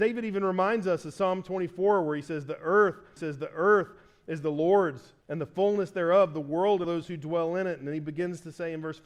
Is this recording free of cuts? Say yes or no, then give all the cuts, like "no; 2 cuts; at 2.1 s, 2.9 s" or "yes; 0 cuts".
no; 3 cuts; at 3.2 s, 5.2 s, 6.8 s